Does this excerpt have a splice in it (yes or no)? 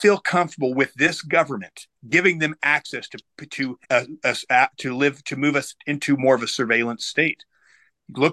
yes